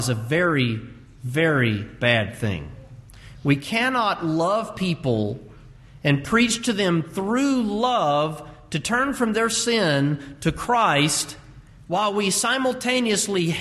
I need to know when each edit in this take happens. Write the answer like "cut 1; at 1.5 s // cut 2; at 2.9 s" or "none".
cut 1; at 11.7 s